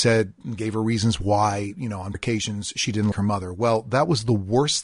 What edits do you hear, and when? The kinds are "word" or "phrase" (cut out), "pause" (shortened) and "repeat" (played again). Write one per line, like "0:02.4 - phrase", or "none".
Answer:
0:02.1 - word
0:03.1 - word